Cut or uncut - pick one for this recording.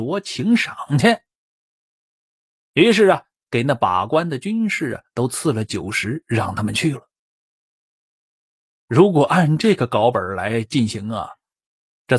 uncut